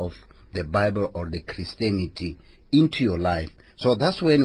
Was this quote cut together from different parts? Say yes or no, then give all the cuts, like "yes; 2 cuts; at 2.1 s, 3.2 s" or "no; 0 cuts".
no; 0 cuts